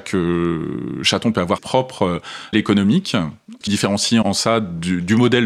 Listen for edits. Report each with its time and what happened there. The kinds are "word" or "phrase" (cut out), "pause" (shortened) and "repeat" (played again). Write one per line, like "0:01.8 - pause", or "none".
0:01.6 - word
0:02.5 - word
0:03.7 - word
0:04.2 - word